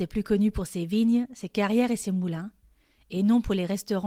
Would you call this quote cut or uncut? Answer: uncut